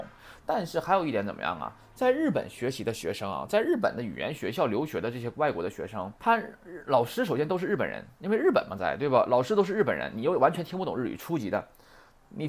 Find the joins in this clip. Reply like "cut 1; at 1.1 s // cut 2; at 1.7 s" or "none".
cut 1; at 6.2 s